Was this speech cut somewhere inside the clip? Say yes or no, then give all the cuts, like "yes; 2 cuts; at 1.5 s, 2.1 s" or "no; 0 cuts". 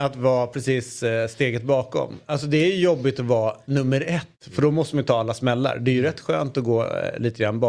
no; 0 cuts